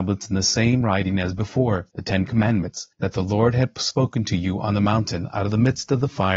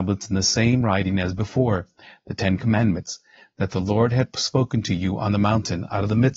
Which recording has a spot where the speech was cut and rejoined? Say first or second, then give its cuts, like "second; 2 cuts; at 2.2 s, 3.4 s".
first; 2 cuts; at 1.9 s, 2.9 s